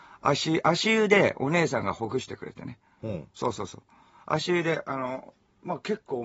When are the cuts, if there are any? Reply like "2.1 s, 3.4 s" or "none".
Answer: none